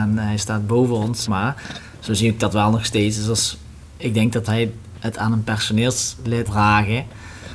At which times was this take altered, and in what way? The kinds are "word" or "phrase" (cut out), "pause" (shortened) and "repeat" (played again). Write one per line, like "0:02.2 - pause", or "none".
0:01.3 - word
0:04.5 - word
0:06.5 - word